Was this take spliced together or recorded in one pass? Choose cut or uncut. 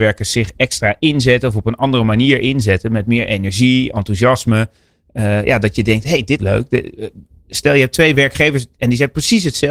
cut